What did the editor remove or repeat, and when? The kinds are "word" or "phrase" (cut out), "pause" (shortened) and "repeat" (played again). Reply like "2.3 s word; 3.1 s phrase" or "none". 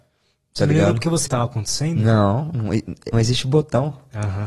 1.3 s phrase; 3.1 s word